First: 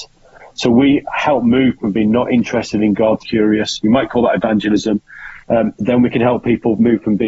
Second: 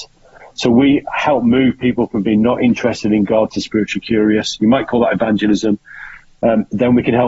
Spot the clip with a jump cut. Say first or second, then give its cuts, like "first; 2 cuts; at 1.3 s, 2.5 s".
first; 3 cuts; at 1.8 s, 3.2 s, 5.4 s